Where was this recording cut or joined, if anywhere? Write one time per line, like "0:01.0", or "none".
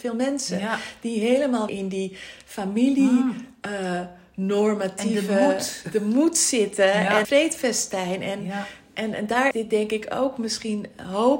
0:01.7
0:07.2
0:09.5